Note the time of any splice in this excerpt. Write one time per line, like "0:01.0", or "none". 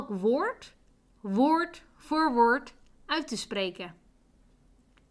none